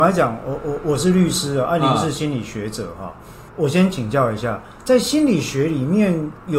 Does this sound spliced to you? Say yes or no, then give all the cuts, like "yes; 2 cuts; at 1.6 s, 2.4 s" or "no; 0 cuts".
yes; 1 cut; at 3.5 s